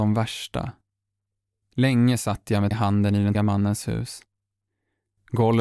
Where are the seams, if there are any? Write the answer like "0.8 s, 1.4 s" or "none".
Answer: 2.7 s, 3.3 s